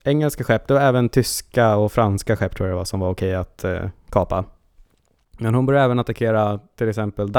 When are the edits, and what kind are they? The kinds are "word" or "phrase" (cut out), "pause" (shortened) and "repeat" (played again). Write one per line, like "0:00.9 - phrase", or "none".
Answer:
none